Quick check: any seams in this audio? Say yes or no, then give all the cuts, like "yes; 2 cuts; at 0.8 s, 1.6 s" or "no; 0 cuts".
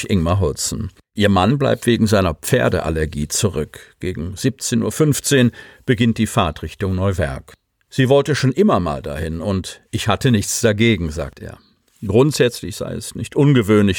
yes; 1 cut; at 1.0 s